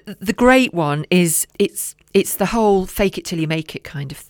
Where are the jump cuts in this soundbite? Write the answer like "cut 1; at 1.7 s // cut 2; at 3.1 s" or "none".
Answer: cut 1; at 1.5 s